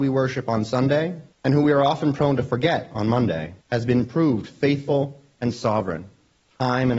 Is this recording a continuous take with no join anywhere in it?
no; 2 cuts; at 1.3 s, 3.6 s

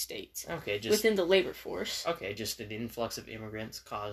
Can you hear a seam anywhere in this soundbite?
no; 0 cuts

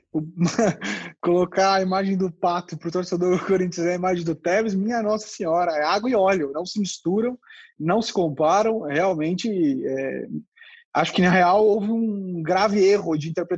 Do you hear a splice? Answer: no; 0 cuts

